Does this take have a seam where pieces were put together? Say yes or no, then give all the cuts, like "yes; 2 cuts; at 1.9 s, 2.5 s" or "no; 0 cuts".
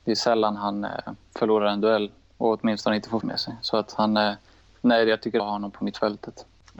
yes; 2 cuts; at 3.2 s, 5.4 s